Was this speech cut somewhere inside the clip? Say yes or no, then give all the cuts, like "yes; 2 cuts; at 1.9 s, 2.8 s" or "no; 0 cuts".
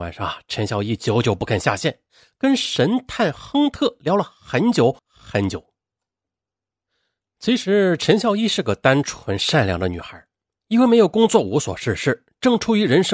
yes; 1 cut; at 5.0 s